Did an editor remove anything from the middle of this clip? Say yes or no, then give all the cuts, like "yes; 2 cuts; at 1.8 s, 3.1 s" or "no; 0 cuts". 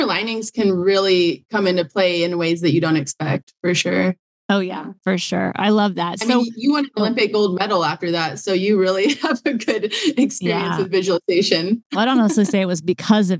no; 0 cuts